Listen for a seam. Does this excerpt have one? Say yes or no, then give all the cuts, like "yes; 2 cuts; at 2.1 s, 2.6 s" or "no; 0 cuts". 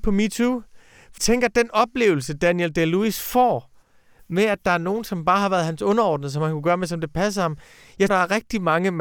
yes; 2 cuts; at 1.2 s, 8.1 s